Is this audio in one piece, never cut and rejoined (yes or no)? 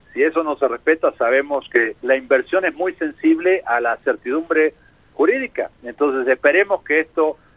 no